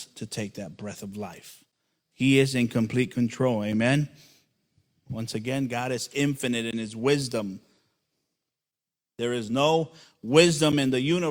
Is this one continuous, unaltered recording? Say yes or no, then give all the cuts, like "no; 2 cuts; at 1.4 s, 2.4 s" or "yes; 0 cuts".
yes; 0 cuts